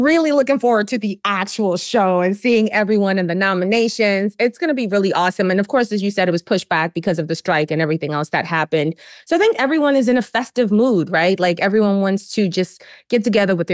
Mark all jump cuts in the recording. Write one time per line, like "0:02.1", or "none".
none